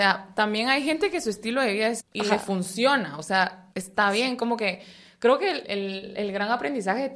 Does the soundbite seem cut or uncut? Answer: cut